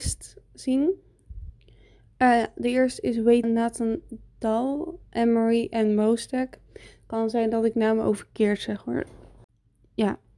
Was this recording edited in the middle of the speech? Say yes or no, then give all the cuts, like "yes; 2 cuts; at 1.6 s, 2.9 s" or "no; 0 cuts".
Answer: yes; 2 cuts; at 3.4 s, 5.1 s